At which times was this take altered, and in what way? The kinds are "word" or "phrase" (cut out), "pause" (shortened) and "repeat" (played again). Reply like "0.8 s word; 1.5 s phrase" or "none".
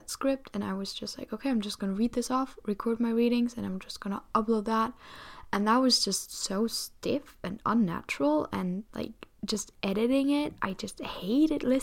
none